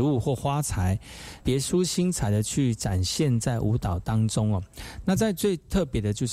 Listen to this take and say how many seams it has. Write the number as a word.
one